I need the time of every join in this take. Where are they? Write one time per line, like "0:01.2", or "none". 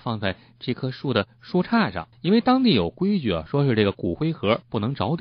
0:02.1